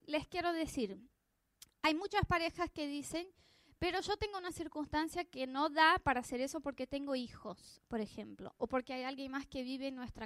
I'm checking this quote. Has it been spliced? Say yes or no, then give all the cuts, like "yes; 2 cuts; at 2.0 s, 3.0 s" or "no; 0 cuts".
no; 0 cuts